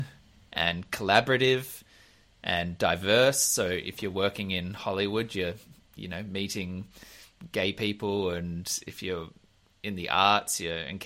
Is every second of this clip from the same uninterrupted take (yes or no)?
yes